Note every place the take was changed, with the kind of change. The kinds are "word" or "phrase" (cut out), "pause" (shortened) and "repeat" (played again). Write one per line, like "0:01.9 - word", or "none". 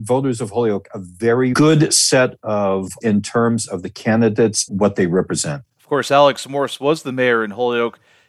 0:01.5 - word
0:03.0 - word
0:04.7 - word
0:05.7 - pause